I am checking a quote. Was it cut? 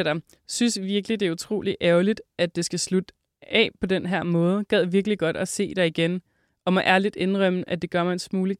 no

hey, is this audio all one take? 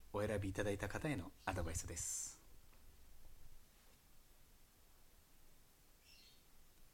yes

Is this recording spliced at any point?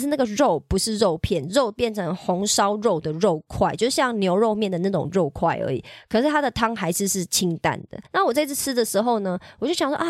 yes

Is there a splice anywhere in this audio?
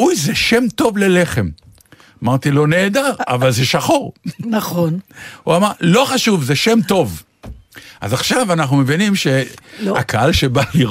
no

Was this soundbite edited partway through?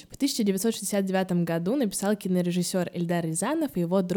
no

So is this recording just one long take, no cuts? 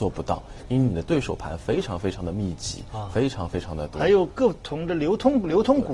yes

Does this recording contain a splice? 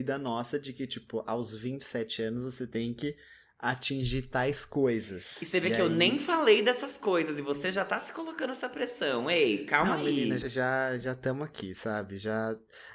yes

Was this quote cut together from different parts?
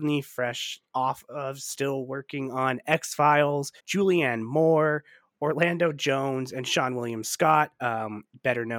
yes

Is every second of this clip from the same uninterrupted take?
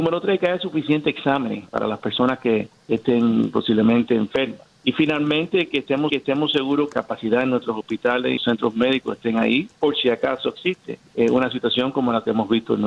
no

